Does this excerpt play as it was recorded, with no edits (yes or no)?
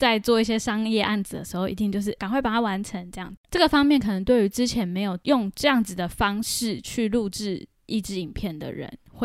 yes